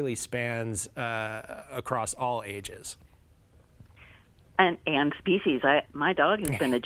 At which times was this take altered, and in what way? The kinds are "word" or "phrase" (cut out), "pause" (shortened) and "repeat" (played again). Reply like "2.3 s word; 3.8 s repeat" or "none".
none

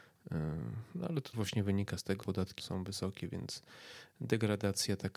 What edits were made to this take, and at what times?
1.3 s word; 2.2 s word; 2.6 s word

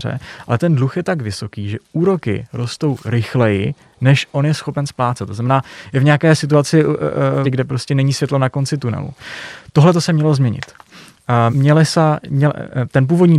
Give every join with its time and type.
7.4 s phrase; 11.5 s word

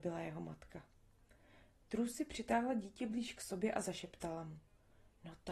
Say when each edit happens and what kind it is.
none

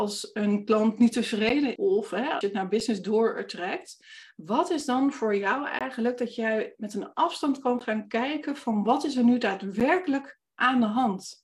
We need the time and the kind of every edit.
1.8 s word; 2.4 s word

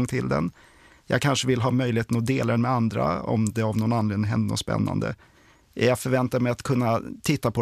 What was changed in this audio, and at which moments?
none

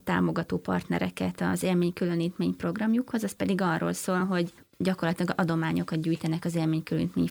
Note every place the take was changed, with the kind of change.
none

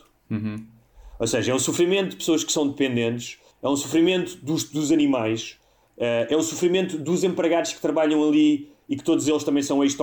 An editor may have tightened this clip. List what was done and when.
3.5 s pause

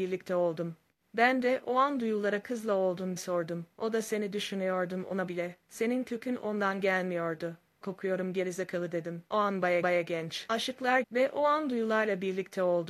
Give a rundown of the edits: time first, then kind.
2.4 s phrase; 3.2 s word; 3.7 s pause; 5.3 s word; 7.8 s phrase; 9.3 s pause; 9.8 s repeat; 11.0 s phrase

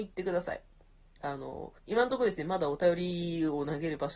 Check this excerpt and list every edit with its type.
1.8 s pause

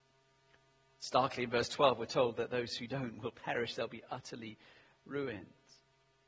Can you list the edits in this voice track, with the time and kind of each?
none

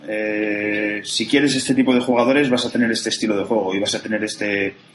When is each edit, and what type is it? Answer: none

